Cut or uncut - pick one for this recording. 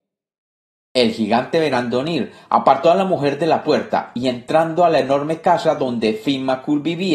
uncut